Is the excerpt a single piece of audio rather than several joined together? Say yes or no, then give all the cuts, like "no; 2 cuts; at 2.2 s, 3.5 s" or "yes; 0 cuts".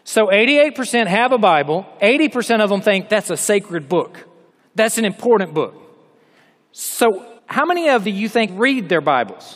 no; 4 cuts; at 4.5 s, 7.4 s, 8.0 s, 8.5 s